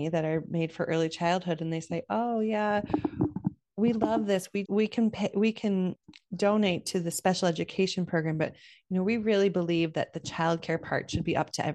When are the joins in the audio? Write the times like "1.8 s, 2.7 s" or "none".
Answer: 4.7 s